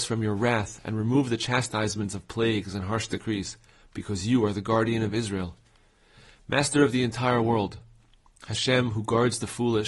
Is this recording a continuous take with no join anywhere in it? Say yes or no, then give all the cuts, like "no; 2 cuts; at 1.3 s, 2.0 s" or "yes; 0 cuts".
yes; 0 cuts